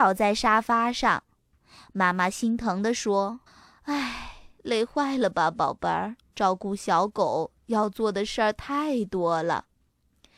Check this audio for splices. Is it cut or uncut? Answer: cut